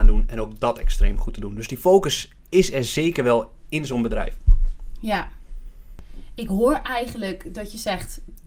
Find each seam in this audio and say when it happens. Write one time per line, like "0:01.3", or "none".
0:02.4

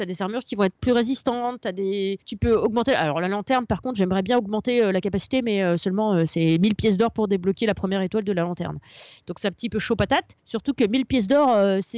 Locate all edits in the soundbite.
0:02.2
0:10.4

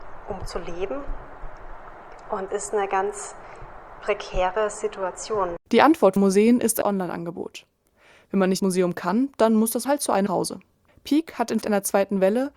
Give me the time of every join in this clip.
0:02.5
0:05.6
0:06.2
0:06.8
0:08.6
0:09.8
0:10.3
0:11.6

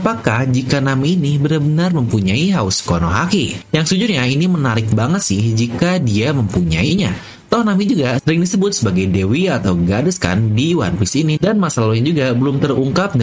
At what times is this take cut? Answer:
none

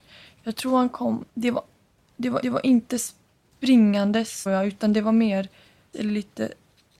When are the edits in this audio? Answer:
0:01.3
0:02.4
0:04.5
0:05.9

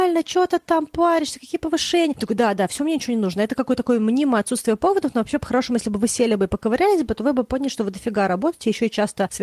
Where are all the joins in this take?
none

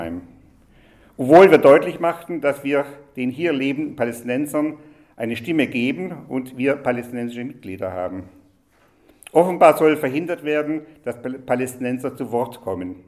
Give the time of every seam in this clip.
none

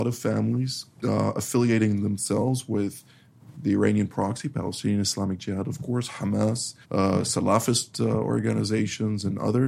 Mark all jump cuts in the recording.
0:01.0
0:06.8

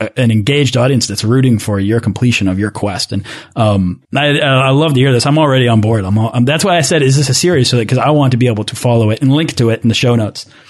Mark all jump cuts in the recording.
0:04.0

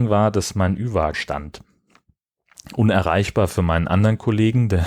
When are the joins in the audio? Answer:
0:01.1

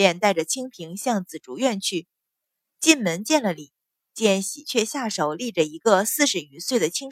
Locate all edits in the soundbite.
none

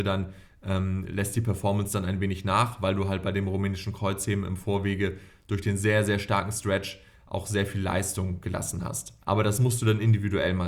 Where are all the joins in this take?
0:09.2

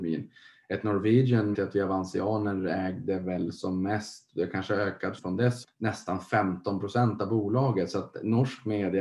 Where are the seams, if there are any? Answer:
0:01.5
0:05.2
0:05.6

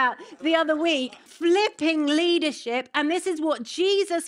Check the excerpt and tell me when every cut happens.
0:01.3

